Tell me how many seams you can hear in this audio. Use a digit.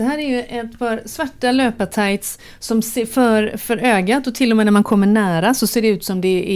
0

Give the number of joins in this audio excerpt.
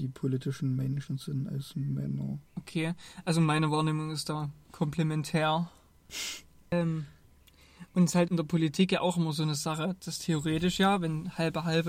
2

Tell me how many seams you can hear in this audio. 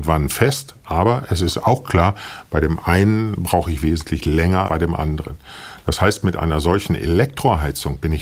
1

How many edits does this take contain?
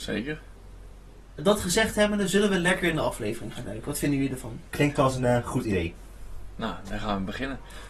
0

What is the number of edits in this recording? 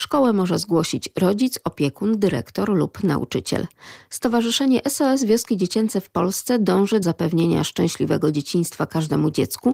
1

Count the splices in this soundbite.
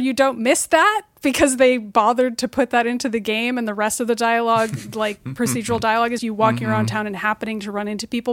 1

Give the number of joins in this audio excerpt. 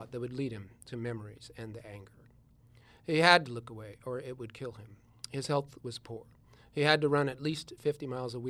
0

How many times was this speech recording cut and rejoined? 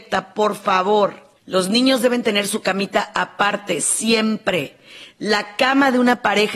1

